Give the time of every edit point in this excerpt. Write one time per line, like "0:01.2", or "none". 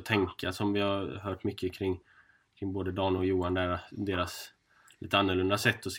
none